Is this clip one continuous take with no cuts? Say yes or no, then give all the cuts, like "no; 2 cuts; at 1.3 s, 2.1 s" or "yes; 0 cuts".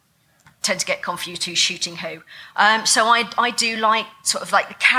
yes; 0 cuts